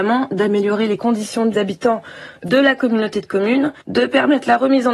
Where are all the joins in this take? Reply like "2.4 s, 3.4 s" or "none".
1.5 s, 3.8 s